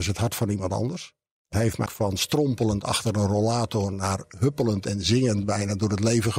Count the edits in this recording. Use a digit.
2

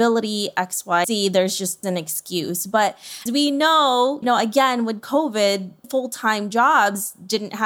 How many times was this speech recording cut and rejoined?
5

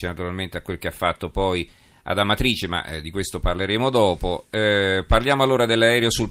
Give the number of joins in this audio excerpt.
0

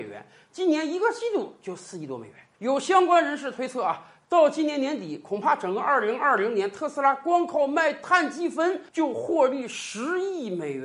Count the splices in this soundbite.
2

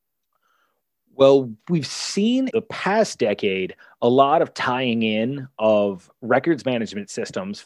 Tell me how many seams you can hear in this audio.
1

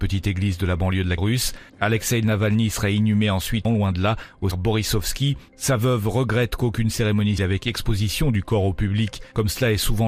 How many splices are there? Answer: 4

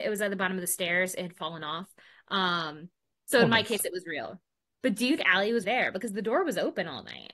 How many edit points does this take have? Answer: 2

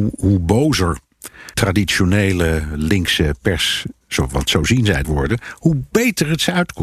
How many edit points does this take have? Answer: 2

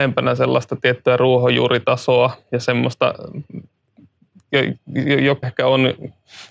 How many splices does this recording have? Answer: 1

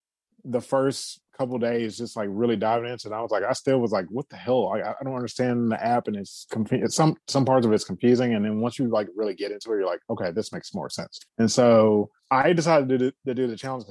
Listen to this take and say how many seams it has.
3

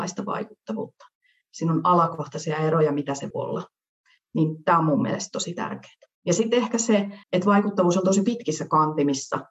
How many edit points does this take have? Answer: 3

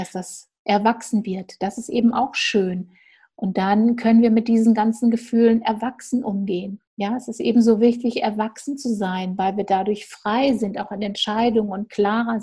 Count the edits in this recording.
1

